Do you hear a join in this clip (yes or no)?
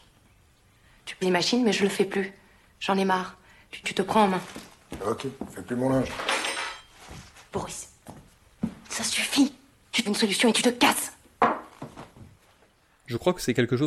yes